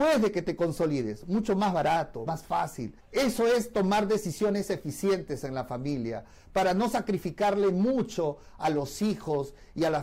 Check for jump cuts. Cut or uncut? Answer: cut